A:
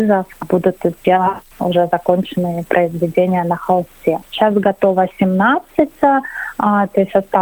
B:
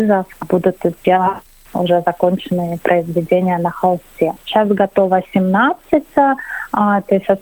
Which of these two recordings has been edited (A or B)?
A